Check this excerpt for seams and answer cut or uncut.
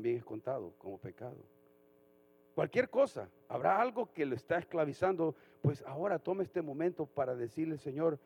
uncut